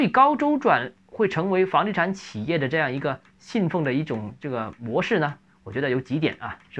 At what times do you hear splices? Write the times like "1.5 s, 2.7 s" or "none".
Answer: none